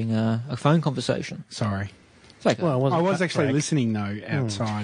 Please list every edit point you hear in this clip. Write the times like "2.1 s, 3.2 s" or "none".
none